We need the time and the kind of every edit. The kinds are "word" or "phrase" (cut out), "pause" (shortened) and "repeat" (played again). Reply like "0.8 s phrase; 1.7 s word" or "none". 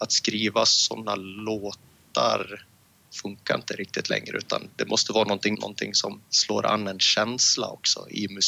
4.7 s word; 5.5 s word; 6.2 s pause